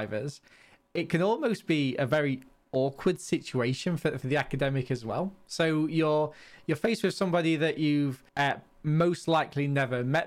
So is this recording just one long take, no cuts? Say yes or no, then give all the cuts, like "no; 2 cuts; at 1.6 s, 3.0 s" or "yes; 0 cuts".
no; 1 cut; at 8.3 s